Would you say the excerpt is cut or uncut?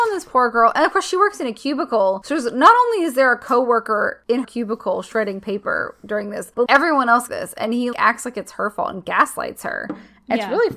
cut